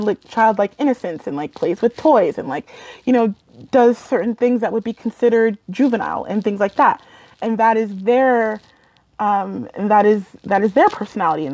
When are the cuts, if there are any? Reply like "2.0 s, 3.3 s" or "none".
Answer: none